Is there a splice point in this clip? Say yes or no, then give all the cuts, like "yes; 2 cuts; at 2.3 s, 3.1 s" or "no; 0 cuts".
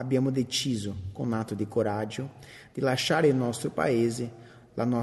no; 0 cuts